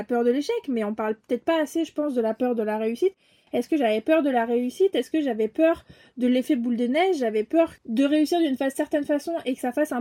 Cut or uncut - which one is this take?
uncut